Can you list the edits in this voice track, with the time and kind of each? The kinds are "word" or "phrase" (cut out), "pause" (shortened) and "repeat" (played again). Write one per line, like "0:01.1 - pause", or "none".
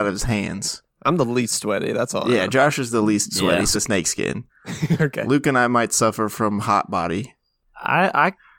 0:03.7 - phrase
0:04.5 - pause